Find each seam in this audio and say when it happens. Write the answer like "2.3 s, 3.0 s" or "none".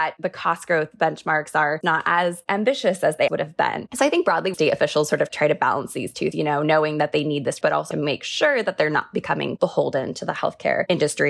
1.8 s, 3.3 s, 4.5 s, 6.3 s, 7.6 s, 7.9 s